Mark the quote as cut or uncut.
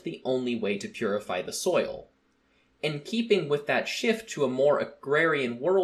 uncut